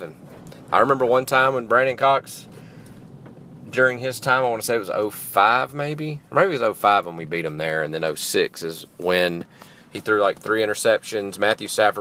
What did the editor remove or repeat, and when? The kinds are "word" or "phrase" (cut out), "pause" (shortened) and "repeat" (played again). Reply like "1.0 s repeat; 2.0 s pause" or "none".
none